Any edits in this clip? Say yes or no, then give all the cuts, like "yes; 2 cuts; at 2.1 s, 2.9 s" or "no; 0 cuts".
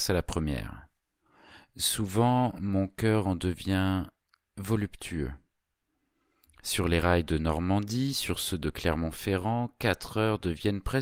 no; 0 cuts